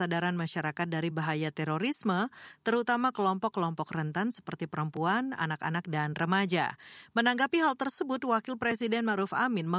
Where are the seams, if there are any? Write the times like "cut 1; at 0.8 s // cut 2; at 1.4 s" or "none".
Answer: none

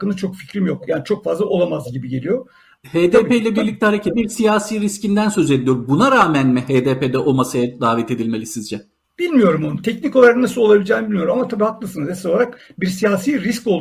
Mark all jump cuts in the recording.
cut 1; at 4.1 s

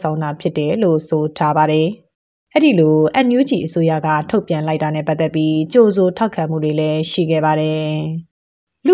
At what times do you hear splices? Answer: none

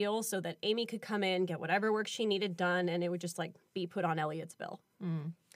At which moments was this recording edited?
none

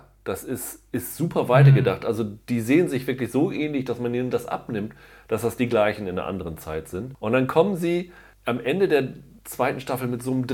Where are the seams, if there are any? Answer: none

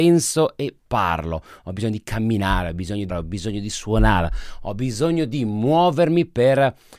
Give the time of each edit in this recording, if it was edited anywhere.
cut 1; at 3.1 s

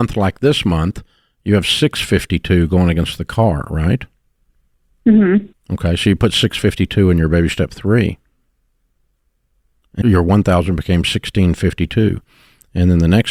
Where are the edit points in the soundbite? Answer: cut 1; at 10.0 s

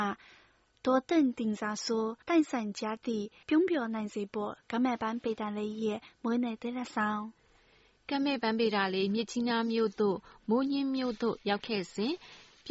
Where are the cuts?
cut 1; at 2.2 s

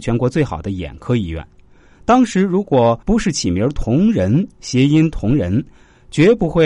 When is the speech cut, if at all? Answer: cut 1; at 3.0 s

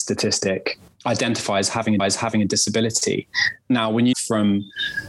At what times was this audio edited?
cut 1; at 2.0 s // cut 2; at 4.1 s

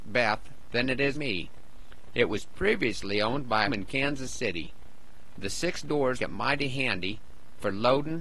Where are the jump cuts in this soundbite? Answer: cut 1; at 1.1 s // cut 2; at 3.7 s // cut 3; at 6.2 s

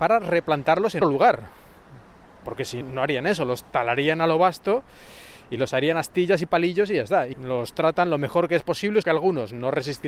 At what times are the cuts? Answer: cut 1; at 1.0 s // cut 2; at 2.8 s // cut 3; at 7.3 s // cut 4; at 9.0 s

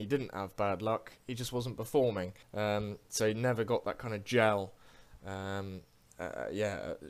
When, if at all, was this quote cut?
cut 1; at 2.4 s

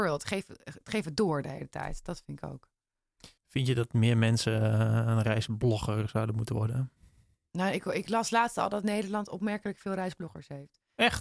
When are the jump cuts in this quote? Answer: cut 1; at 3.4 s

